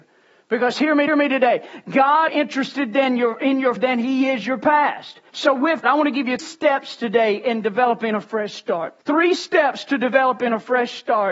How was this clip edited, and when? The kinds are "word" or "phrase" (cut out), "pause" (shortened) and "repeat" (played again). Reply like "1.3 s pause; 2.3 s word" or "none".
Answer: 1.1 s repeat; 2.3 s phrase; 3.8 s word; 5.3 s pause; 5.8 s word; 6.4 s word; 9.0 s pause